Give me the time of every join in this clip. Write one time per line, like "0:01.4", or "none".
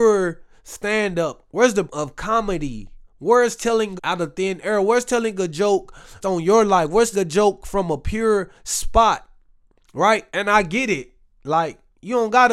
0:01.5
0:01.9
0:03.1
0:04.0
0:06.2
0:07.1
0:08.5
0:10.3